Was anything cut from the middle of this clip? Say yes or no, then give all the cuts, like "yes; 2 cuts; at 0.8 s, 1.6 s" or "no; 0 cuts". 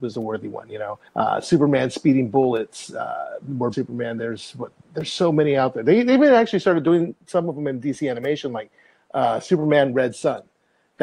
yes; 2 cuts; at 1.1 s, 3.7 s